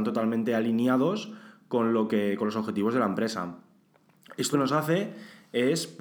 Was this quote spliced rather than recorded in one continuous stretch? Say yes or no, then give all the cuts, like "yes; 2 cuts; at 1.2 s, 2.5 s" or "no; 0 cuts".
yes; 1 cut; at 4.5 s